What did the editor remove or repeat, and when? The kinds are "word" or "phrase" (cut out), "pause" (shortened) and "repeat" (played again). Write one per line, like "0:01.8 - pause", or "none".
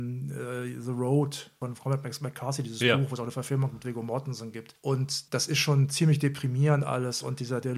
0:05.3 - pause